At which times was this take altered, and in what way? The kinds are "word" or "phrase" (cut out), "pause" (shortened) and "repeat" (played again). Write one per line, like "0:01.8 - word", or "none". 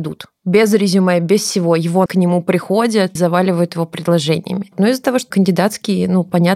0:02.1 - word
0:03.2 - word
0:05.3 - word